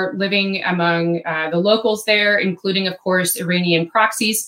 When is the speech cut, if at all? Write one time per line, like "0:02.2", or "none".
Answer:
none